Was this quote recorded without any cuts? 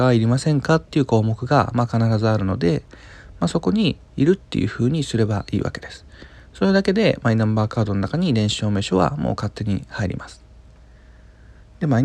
yes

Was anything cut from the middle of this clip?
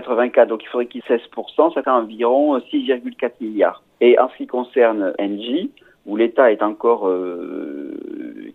yes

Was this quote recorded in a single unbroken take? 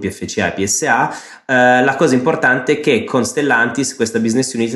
yes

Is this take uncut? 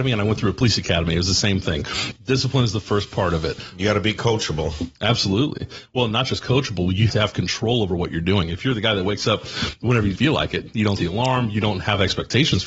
no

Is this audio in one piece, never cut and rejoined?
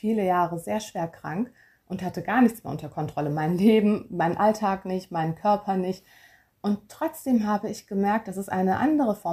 yes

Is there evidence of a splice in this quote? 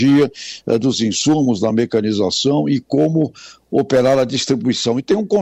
no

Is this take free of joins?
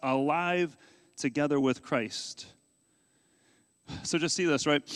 yes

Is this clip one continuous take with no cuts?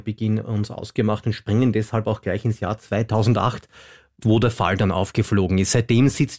yes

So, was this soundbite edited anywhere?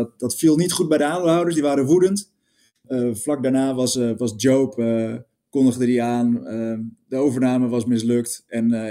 no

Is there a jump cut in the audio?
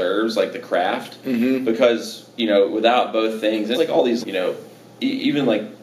yes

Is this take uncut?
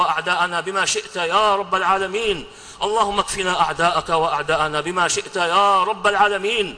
yes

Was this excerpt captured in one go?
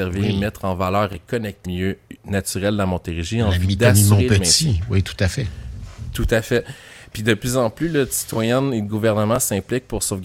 no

